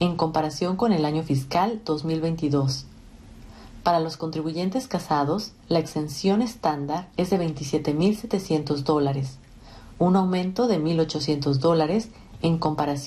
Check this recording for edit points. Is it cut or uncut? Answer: cut